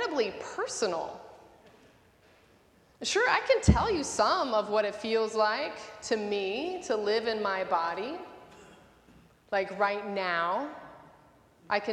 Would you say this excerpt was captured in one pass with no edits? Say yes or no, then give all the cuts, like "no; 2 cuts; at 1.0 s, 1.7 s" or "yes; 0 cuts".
yes; 0 cuts